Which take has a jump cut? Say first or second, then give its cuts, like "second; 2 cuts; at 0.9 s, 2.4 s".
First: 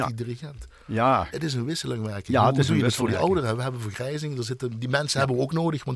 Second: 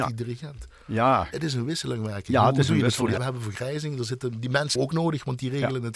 second; 2 cuts; at 3.2 s, 4.8 s